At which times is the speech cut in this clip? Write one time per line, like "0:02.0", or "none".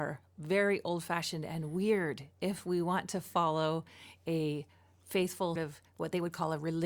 0:05.6